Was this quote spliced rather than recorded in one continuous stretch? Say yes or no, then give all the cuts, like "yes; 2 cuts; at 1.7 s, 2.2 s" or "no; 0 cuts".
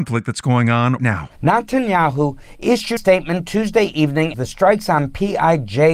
yes; 3 cuts; at 1.0 s, 3.0 s, 4.3 s